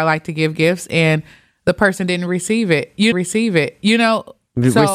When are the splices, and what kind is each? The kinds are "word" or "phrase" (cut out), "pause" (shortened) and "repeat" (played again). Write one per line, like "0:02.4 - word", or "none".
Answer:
0:03.1 - repeat

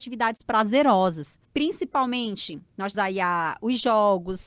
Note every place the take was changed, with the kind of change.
0:01.4 - pause
0:02.9 - word

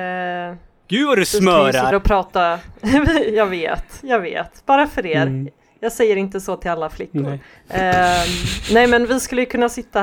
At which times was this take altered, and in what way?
0:01.9 - phrase
0:07.6 - pause

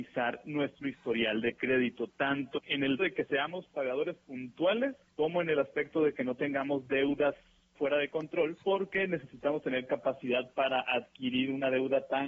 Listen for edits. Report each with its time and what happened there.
0:02.5 - word
0:03.0 - word
0:05.1 - pause
0:07.7 - phrase
0:08.6 - pause

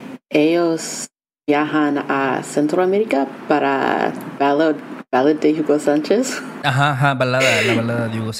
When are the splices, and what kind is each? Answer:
none

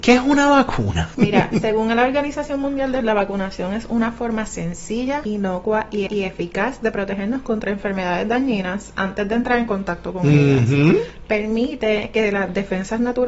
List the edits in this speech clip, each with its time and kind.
0:03.0 - phrase
0:06.1 - repeat

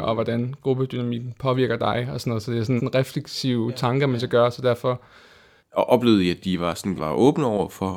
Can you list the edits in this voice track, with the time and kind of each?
0:02.8 - word
0:07.0 - word

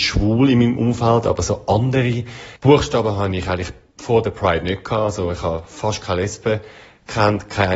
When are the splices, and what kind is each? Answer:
0:02.6 - pause

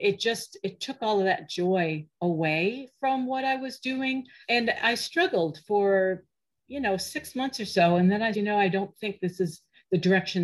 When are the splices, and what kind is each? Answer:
0:04.4 - word
0:08.3 - word

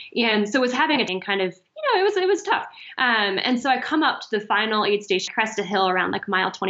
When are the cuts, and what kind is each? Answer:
0:01.1 - phrase
0:05.3 - word

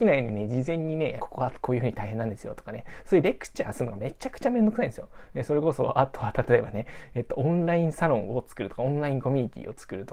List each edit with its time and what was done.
0:01.2 - phrase

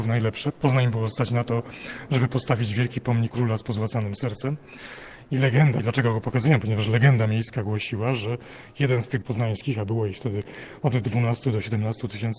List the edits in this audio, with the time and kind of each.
0:03.3 - word
0:05.8 - word
0:09.2 - word

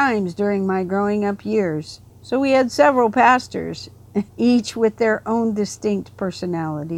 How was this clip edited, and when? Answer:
0:02.1 - pause
0:04.3 - pause

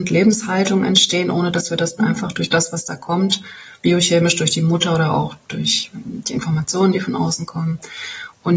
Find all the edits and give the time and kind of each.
0:02.0 - phrase
0:03.8 - pause

